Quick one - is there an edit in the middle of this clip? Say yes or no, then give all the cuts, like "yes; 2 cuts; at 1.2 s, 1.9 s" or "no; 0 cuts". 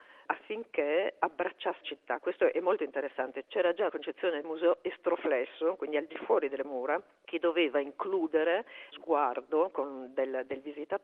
yes; 6 cuts; at 1.8 s, 3.4 s, 3.9 s, 4.4 s, 6.6 s, 8.9 s